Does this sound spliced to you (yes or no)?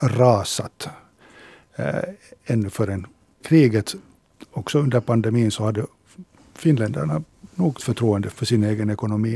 yes